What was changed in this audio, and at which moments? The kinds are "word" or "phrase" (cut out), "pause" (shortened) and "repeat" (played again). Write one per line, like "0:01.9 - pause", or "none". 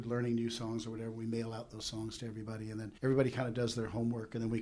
0:03.0 - pause